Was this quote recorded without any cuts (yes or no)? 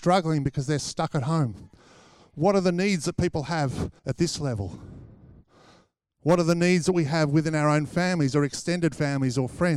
no